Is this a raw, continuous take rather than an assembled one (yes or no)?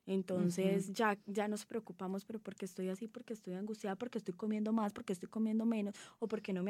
yes